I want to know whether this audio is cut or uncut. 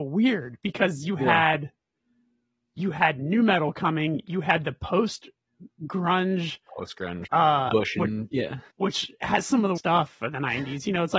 cut